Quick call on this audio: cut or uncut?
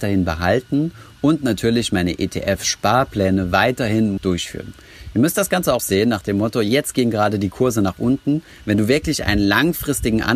cut